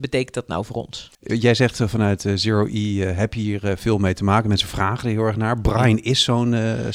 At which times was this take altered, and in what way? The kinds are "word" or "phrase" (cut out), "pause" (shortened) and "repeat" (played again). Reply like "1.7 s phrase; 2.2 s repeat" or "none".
1.1 s pause